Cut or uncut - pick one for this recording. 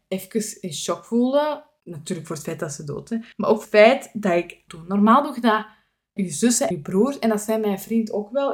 cut